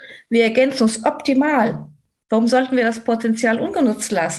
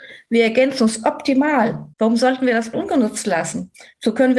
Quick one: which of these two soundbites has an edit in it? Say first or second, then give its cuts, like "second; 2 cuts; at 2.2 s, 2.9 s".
second; 2 cuts; at 1.9 s, 2.7 s